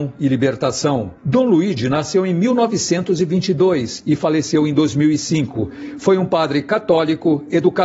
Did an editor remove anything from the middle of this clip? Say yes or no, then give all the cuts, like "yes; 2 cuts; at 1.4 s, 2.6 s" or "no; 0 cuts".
yes; 1 cut; at 1.2 s